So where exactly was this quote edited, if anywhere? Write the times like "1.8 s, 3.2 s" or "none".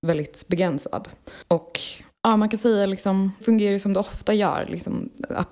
3.4 s